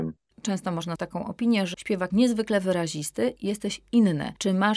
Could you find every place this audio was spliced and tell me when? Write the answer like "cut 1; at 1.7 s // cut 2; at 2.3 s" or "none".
cut 1; at 1.0 s // cut 2; at 1.7 s // cut 3; at 2.1 s